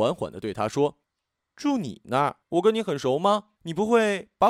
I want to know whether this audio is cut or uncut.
cut